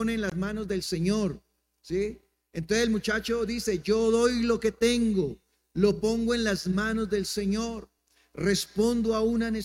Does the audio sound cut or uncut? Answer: uncut